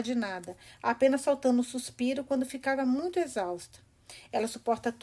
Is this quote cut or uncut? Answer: uncut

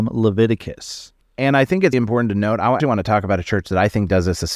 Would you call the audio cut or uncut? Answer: cut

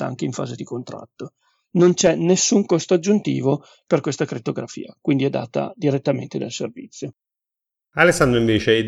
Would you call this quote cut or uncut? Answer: uncut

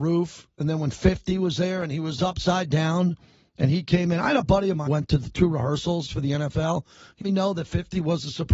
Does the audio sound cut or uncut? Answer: cut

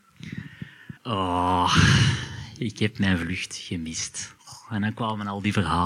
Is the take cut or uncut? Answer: cut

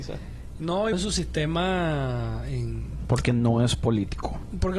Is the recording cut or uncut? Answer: cut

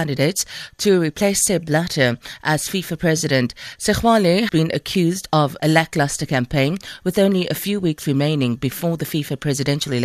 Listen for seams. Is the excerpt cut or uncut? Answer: cut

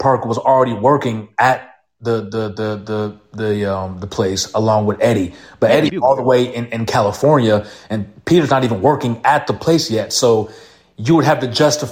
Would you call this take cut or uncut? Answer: uncut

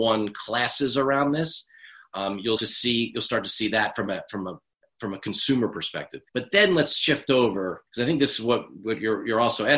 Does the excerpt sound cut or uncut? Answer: cut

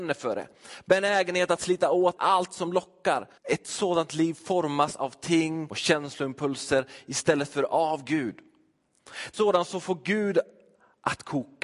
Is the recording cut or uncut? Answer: cut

